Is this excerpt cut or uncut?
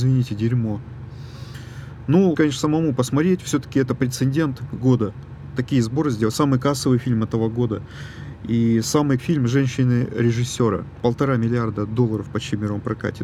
cut